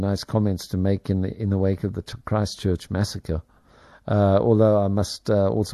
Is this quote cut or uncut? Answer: cut